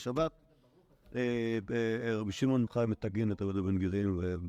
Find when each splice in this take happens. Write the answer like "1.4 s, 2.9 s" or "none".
2.7 s